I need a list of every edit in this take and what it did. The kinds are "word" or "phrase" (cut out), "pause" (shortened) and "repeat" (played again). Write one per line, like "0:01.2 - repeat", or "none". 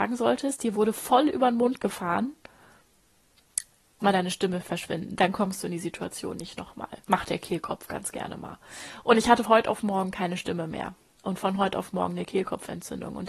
0:04.0 - phrase
0:07.0 - pause
0:09.4 - word

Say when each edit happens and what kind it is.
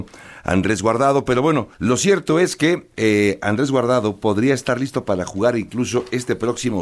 0:01.7 - pause

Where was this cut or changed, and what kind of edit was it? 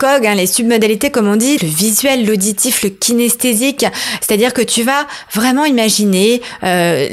0:01.6 - word

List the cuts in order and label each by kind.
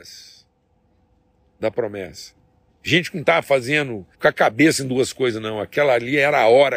0:02.7 - pause
0:04.1 - pause

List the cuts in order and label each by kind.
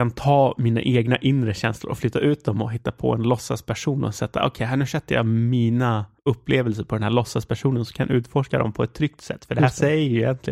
0:06.2 - pause

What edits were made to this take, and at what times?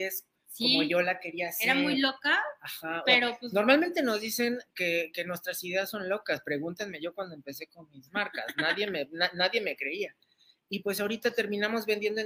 none

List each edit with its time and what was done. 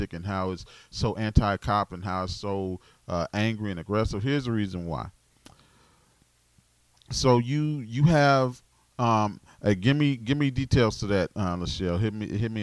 none

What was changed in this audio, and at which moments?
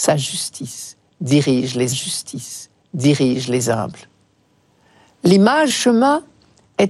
0:01.9 - repeat
0:05.7 - word

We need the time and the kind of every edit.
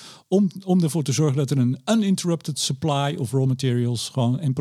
none

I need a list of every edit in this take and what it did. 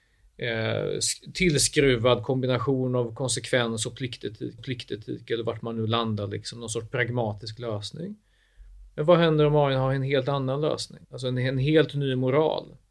0:04.6 - repeat
0:11.0 - pause

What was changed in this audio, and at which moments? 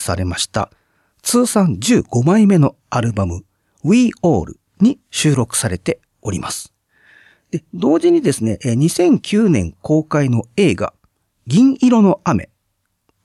none

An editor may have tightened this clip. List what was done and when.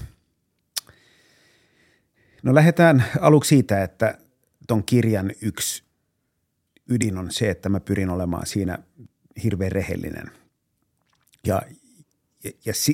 none

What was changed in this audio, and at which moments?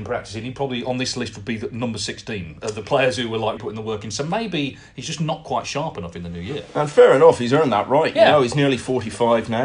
0:03.6 - word

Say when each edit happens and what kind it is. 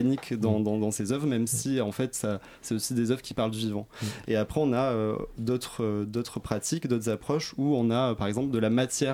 none

